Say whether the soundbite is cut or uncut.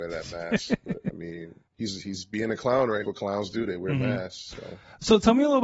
cut